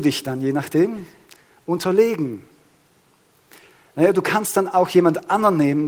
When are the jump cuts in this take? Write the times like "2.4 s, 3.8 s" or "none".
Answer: none